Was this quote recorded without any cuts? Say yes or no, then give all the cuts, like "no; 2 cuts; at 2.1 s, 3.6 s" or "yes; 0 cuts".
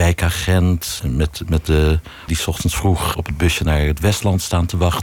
no; 3 cuts; at 1.0 s, 2.3 s, 3.1 s